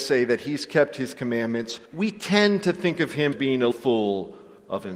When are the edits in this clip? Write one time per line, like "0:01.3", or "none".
0:01.9
0:03.3
0:03.7